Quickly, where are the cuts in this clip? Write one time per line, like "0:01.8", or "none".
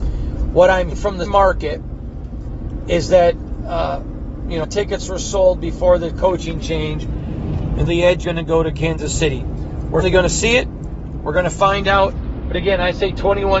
0:00.9
0:01.3
0:04.6
0:07.9
0:08.2
0:10.0